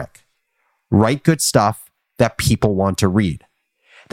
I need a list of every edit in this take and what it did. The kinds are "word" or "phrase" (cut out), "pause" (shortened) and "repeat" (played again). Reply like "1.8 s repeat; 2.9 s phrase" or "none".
none